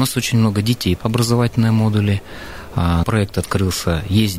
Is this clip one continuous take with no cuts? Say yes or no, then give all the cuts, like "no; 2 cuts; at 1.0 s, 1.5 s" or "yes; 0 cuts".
no; 2 cuts; at 1.0 s, 3.0 s